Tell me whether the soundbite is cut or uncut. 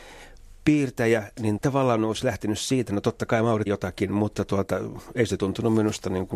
cut